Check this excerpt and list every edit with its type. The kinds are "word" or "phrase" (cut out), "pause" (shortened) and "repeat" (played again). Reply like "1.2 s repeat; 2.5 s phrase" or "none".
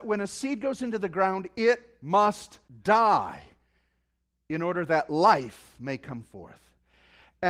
2.7 s pause